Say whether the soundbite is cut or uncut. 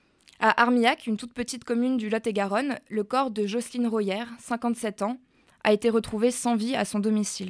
uncut